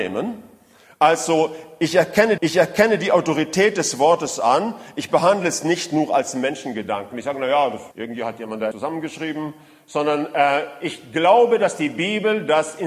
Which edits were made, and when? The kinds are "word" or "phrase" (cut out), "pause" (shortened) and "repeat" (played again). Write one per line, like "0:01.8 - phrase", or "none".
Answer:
0:02.4 - repeat
0:07.9 - pause
0:08.7 - word